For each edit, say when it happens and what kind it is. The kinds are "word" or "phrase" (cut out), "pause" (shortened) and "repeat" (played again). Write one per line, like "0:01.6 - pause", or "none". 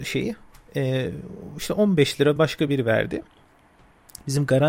none